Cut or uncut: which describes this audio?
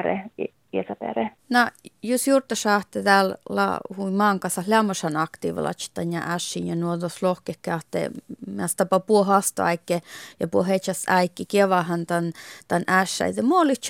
cut